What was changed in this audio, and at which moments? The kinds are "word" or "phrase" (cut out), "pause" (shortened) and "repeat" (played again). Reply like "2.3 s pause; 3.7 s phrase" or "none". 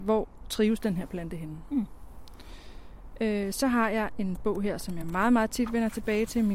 none